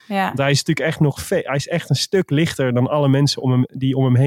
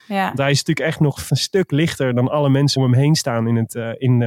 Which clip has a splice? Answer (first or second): second